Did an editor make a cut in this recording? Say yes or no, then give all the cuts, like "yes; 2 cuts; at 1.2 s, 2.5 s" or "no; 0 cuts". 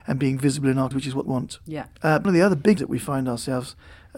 yes; 4 cuts; at 0.9 s, 1.2 s, 2.2 s, 2.8 s